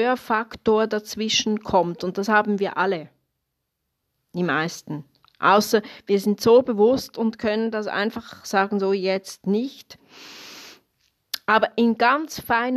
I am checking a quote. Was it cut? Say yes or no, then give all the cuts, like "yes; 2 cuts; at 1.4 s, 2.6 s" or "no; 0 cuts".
no; 0 cuts